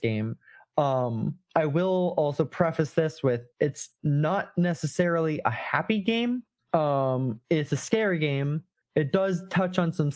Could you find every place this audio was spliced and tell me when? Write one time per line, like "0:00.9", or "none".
0:03.5
0:06.6
0:08.8